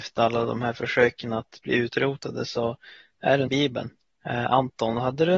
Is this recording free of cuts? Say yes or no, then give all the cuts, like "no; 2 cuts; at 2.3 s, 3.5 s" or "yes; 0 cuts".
no; 1 cut; at 3.5 s